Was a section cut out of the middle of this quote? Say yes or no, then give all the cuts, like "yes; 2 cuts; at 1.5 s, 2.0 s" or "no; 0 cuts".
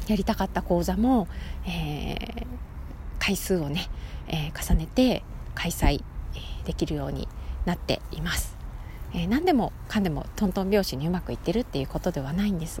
no; 0 cuts